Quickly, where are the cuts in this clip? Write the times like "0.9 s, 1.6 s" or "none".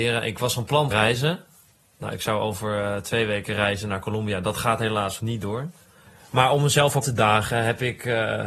0.9 s, 5.2 s, 7.0 s

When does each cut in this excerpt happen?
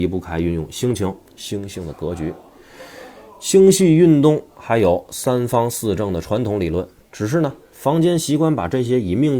1.3 s, 7.0 s

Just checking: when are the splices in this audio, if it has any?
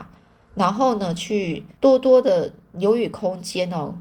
1.8 s

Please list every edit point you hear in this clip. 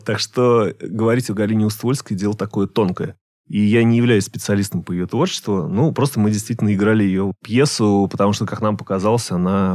none

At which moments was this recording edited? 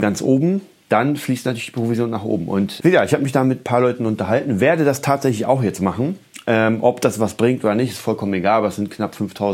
2.8 s

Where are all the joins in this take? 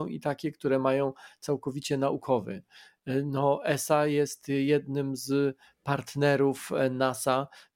none

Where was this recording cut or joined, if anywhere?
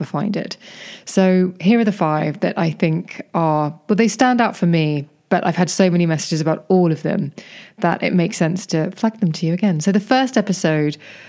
none

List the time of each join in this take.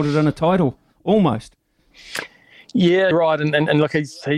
3.1 s

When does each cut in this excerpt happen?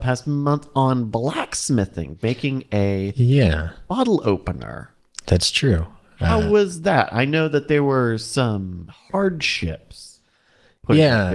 none

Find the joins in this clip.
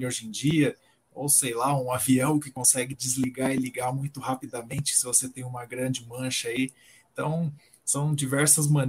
none

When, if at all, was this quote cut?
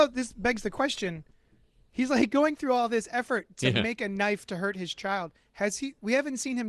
none

